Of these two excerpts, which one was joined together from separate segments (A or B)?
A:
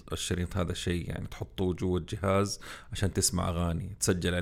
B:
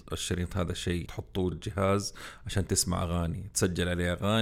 B